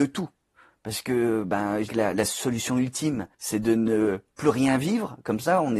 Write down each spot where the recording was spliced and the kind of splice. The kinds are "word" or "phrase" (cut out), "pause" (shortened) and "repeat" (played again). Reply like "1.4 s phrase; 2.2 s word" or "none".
1.9 s word; 3.3 s pause; 4.3 s pause